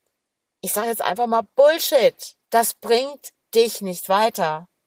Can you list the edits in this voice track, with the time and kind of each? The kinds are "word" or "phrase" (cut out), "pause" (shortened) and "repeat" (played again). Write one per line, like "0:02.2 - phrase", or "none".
0:02.4 - pause